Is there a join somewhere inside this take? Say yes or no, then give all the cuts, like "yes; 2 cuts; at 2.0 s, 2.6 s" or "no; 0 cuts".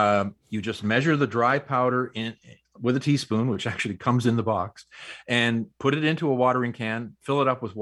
no; 0 cuts